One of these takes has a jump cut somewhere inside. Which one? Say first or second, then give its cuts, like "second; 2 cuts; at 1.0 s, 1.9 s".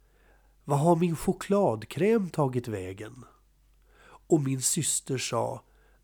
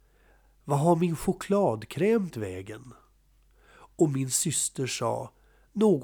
second; 1 cut; at 2.3 s